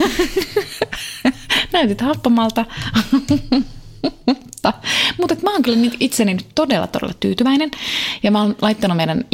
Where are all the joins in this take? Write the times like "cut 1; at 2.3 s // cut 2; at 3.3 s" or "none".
none

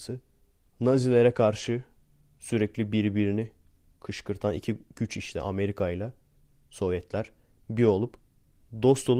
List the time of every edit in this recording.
none

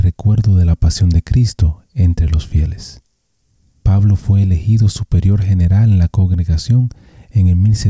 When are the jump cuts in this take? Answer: none

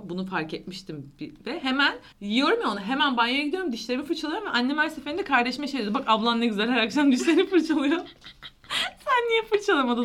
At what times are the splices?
cut 1; at 2.1 s

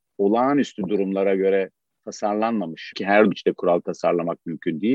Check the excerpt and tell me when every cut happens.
cut 1; at 2.9 s // cut 2; at 3.3 s

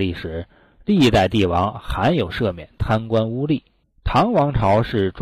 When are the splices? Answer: cut 1; at 3.8 s

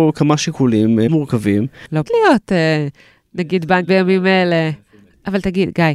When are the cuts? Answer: cut 1; at 1.1 s // cut 2; at 2.1 s // cut 3; at 3.9 s

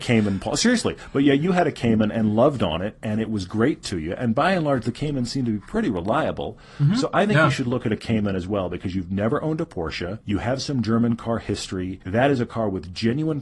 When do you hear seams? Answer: cut 1; at 10.2 s // cut 2; at 12.0 s

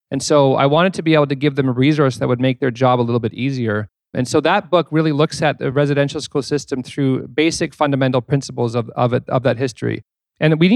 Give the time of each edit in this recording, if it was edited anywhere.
none

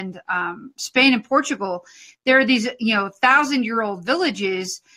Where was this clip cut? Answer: none

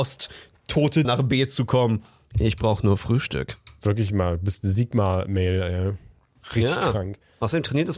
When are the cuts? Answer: cut 1; at 1.0 s

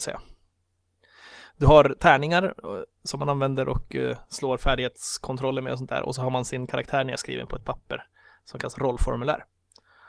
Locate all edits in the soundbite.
none

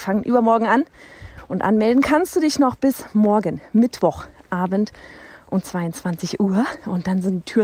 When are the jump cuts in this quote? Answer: none

